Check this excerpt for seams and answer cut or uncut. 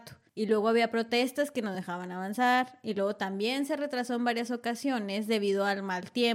uncut